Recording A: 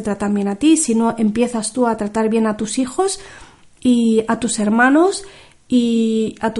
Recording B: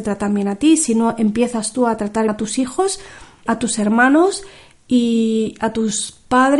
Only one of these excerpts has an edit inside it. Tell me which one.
B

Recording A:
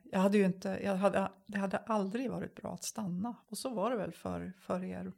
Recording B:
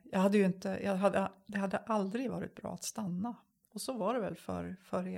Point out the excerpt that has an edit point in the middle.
A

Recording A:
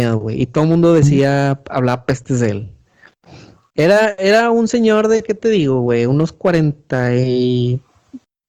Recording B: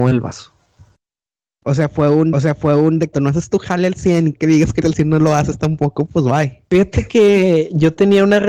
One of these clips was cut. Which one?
B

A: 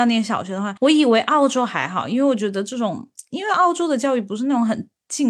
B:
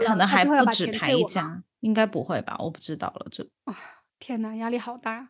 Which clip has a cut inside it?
B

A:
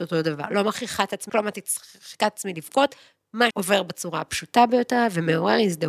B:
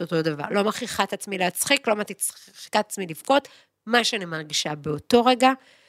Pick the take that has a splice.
A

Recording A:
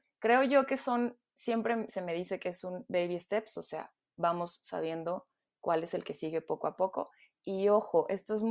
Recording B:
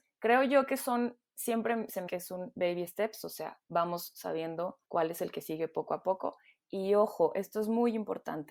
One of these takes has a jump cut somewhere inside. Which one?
B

